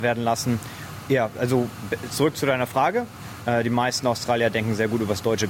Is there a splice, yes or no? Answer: no